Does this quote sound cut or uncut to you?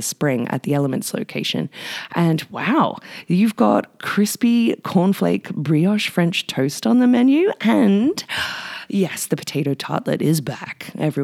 uncut